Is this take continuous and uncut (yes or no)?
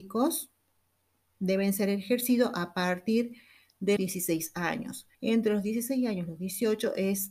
no